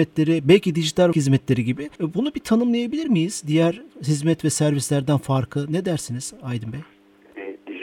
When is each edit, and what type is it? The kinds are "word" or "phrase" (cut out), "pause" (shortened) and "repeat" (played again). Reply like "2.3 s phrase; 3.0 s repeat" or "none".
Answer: 1.1 s word; 1.9 s pause